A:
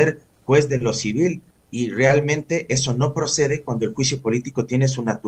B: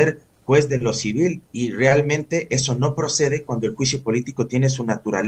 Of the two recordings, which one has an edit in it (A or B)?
B